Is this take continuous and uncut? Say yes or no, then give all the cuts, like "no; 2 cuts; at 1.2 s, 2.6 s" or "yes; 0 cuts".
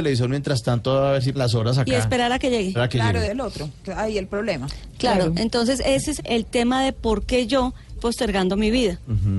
no; 6 cuts; at 1.3 s, 2.7 s, 3.2 s, 3.8 s, 6.2 s, 8.0 s